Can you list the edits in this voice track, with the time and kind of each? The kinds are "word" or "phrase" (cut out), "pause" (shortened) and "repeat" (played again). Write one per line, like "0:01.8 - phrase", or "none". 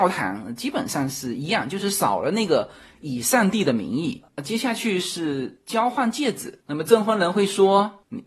none